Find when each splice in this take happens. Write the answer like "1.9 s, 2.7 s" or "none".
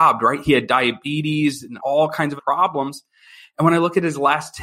1.8 s, 2.4 s